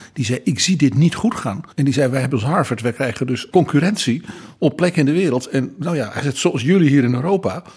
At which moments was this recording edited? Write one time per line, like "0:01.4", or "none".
0:01.7
0:03.5